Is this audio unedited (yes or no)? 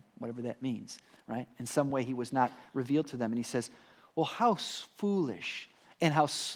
yes